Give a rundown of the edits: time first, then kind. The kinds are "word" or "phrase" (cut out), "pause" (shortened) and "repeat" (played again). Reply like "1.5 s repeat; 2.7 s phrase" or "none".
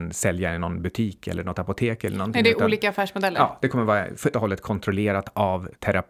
4.3 s word

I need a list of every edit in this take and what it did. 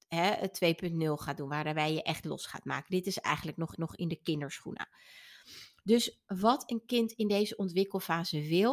3.8 s repeat

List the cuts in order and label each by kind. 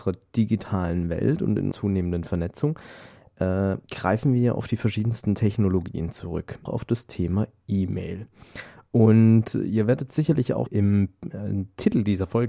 1.7 s word; 3.8 s pause; 6.7 s phrase; 10.7 s word

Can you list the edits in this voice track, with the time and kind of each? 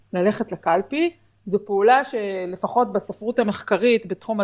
none

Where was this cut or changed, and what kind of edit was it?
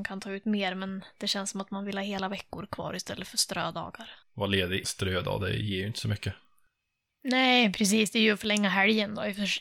4.2 s pause; 4.8 s word

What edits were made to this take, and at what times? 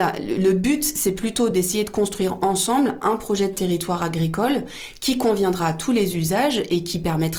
none

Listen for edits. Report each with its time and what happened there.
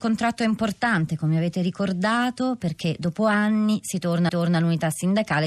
4.3 s repeat

